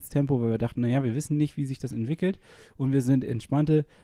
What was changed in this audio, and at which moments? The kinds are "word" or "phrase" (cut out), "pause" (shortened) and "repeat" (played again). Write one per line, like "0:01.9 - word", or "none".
none